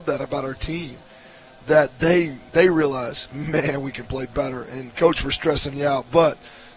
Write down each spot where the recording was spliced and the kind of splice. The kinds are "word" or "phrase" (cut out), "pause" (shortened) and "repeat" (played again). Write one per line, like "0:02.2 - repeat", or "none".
none